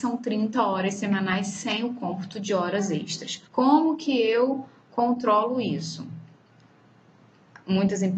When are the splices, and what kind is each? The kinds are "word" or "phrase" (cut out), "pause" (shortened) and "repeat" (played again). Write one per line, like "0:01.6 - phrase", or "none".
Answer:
0:03.5 - pause